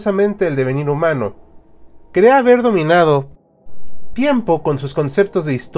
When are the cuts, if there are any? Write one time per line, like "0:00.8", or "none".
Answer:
0:02.0
0:04.1

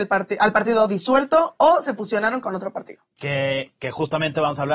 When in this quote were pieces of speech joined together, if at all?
0:03.7

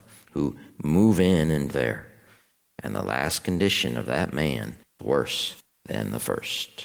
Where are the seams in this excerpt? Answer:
0:01.7
0:05.0

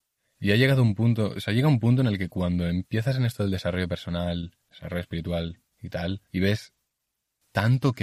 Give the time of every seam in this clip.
0:05.7
0:06.3

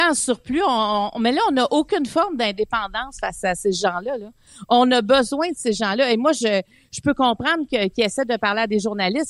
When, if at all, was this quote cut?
none

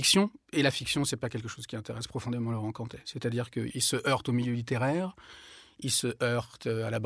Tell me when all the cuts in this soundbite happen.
0:03.7

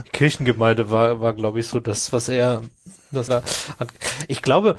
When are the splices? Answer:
0:03.3

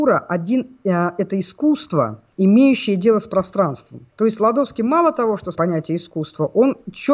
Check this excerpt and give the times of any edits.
0:02.3
0:04.1
0:05.5

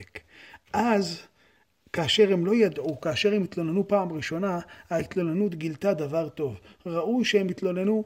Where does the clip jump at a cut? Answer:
none

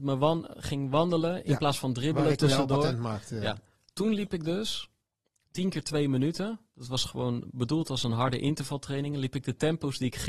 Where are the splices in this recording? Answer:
0:03.7

